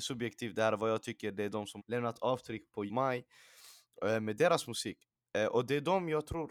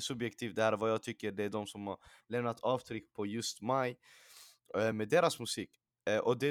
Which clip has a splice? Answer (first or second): first